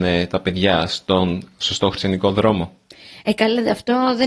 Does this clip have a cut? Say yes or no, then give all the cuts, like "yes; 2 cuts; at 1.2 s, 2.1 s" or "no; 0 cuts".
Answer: no; 0 cuts